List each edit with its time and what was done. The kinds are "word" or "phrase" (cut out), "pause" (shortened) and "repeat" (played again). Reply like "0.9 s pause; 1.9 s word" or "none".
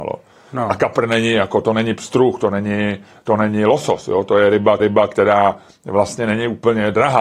4.8 s repeat